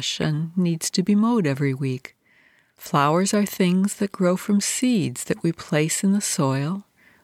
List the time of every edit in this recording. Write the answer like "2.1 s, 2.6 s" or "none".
none